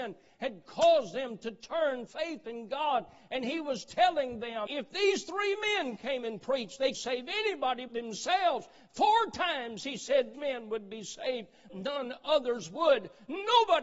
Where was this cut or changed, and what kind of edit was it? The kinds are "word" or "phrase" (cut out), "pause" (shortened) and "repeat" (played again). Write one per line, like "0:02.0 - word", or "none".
0:02.1 - word
0:04.7 - word
0:06.9 - word
0:07.9 - word
0:10.3 - word
0:11.7 - word